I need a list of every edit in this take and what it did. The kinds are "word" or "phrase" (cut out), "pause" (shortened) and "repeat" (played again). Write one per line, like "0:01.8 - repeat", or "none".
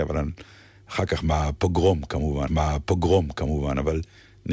0:02.5 - repeat